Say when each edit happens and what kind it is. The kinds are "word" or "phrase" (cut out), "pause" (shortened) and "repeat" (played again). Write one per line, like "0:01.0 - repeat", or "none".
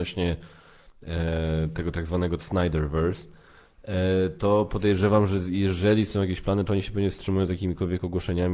0:02.4 - word

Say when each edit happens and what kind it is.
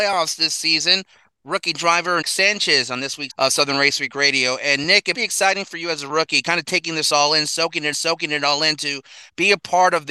0:02.2 - word
0:03.3 - word
0:05.1 - word
0:07.9 - repeat

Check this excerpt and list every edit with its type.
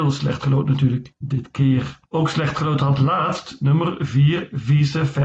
0:02.1 - pause

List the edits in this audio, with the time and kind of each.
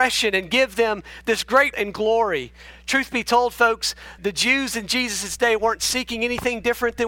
0:01.7 - word
0:04.2 - word

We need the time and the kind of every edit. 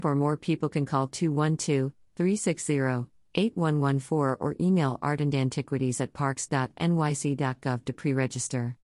none

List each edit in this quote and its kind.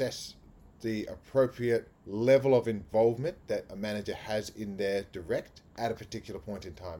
0:02.0 - pause
0:05.7 - pause

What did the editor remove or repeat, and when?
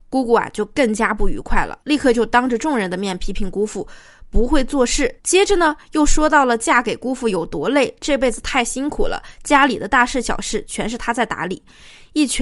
0:01.8 - pause
0:05.2 - pause

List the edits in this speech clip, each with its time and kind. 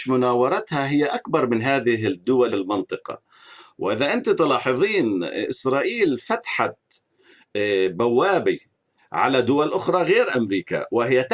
0:02.5 - phrase

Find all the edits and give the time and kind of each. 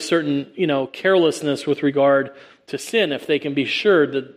none

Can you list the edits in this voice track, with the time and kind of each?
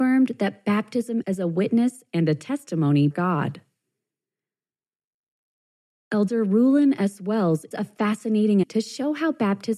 0:01.2 - word
0:03.1 - word
0:07.7 - word
0:08.6 - word

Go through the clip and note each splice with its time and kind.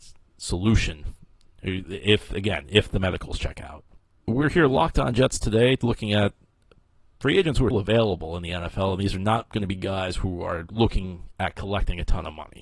0:07.7 - word

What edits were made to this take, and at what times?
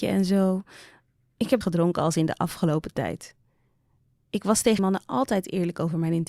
0:01.6 - phrase
0:04.8 - word

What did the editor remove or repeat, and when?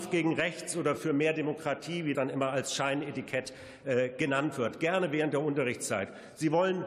0:02.1 - word

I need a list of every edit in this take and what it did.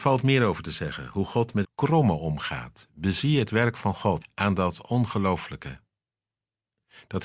0:01.6 - word
0:04.2 - phrase

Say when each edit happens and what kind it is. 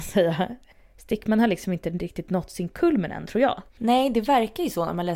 0:03.7 - pause

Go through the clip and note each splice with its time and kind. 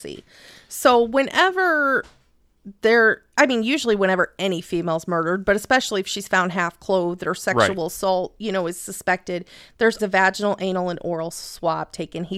0:10.0 - word

